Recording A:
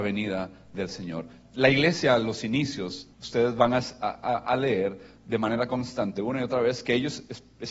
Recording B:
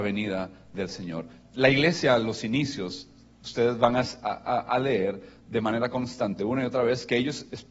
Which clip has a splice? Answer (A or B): A